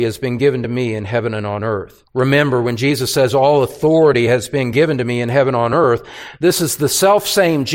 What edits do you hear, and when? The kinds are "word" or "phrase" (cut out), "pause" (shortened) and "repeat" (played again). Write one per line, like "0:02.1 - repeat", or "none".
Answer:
0:02.1 - pause